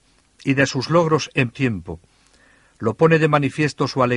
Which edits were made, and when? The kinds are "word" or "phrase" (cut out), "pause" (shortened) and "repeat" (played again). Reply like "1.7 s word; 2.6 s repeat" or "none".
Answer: 1.5 s word